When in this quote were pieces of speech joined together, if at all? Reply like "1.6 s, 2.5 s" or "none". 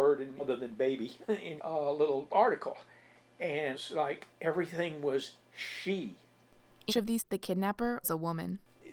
1.6 s, 3.7 s, 6.9 s, 7.2 s, 8.0 s